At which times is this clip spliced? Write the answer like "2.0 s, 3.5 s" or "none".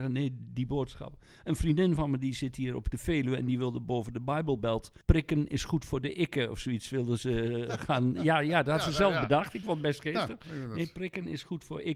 5.0 s